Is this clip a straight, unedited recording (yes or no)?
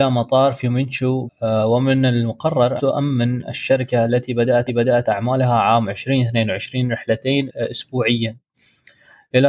no